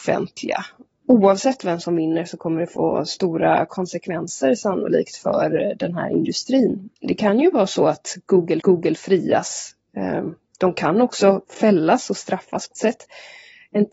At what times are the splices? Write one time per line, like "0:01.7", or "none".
0:07.0
0:08.6
0:12.7